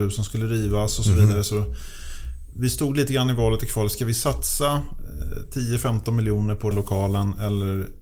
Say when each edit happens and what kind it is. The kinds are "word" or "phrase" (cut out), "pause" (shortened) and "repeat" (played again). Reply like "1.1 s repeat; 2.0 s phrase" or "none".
6.7 s phrase